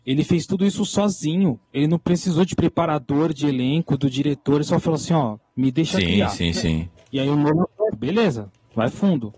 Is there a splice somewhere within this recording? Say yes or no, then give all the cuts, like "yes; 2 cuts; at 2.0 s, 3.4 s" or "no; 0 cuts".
yes; 3 cuts; at 1.6 s, 2.6 s, 7.9 s